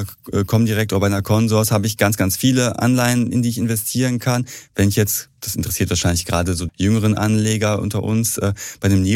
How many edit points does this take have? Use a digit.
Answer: 1